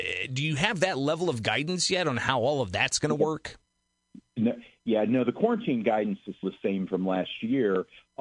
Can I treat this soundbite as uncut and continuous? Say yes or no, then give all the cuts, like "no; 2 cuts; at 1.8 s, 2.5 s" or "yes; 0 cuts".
no; 1 cut; at 6.4 s